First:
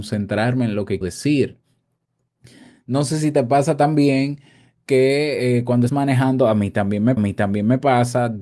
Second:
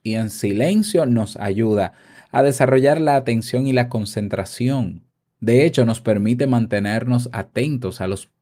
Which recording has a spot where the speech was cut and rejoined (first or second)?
first